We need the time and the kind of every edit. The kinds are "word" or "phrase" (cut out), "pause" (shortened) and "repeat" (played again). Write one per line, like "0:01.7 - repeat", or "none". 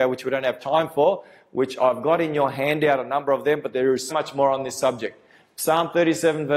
0:04.1 - word